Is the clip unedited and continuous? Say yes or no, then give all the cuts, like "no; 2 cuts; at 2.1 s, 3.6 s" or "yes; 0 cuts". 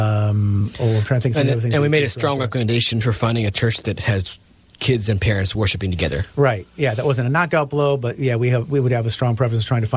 yes; 0 cuts